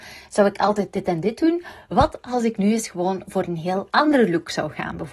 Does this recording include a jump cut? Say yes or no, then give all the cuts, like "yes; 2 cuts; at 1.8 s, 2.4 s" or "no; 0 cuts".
no; 0 cuts